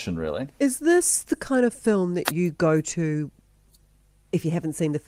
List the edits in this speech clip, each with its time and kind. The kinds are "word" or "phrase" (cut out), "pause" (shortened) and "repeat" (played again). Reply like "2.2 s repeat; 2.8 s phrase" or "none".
none